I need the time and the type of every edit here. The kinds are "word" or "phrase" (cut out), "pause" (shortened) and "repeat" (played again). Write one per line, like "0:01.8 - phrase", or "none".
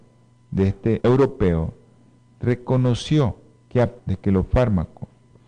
0:01.0 - word
0:04.0 - word